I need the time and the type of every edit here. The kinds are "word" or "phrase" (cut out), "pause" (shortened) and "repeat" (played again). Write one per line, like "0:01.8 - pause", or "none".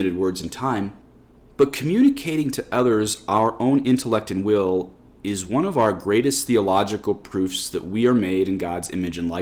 none